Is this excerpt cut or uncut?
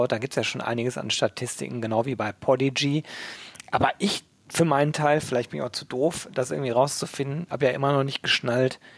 uncut